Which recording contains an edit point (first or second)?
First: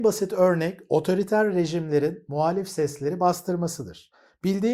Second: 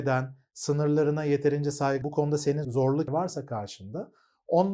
second